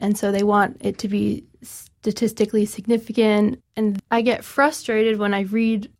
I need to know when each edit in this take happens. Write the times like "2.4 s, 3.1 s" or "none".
4.0 s